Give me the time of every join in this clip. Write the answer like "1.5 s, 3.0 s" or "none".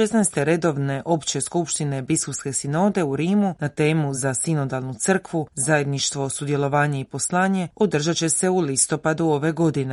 none

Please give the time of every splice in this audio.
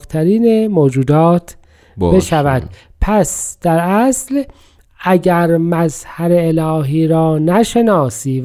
none

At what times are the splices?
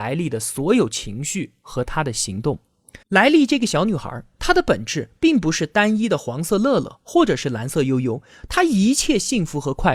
3.0 s

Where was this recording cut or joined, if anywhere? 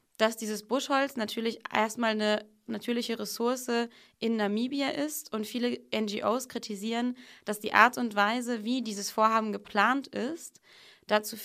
none

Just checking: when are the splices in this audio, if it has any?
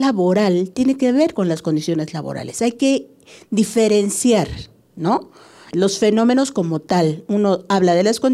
none

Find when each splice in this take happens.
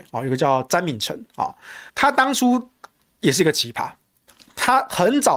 1.9 s

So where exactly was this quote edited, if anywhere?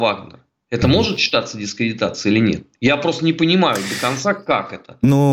none

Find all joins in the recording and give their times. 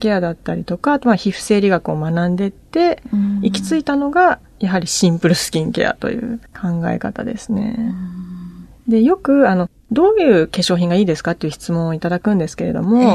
6.5 s, 9.8 s

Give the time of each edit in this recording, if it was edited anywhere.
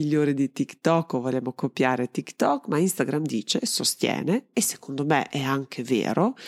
none

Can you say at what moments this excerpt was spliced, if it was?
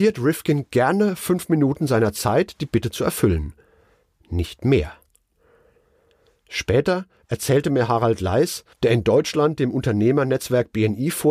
8.7 s

